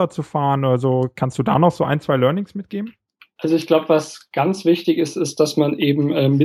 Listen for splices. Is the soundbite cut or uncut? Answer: uncut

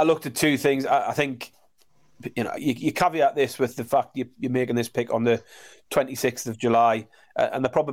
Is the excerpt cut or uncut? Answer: uncut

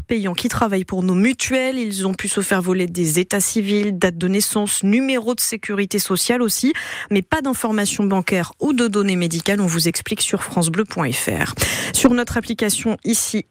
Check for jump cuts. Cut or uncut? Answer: uncut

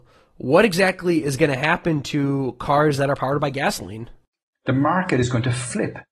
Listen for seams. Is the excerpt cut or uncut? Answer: uncut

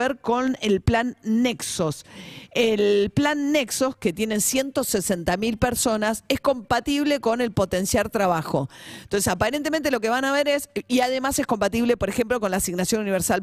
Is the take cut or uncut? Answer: uncut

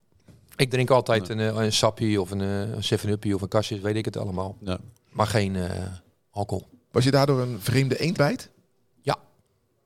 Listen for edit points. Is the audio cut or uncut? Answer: cut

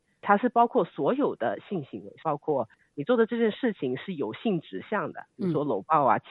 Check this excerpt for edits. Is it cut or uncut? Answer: cut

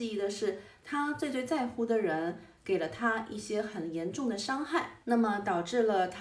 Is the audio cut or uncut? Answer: cut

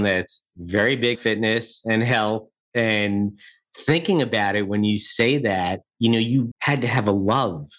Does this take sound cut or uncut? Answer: cut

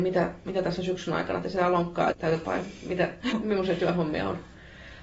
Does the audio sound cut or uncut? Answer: cut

